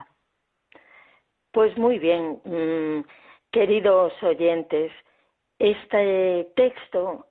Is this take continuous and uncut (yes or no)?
yes